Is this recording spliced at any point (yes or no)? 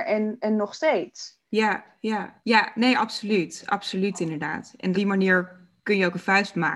yes